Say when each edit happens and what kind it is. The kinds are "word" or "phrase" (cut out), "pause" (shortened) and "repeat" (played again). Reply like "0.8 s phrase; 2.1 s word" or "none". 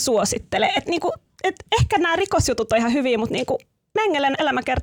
none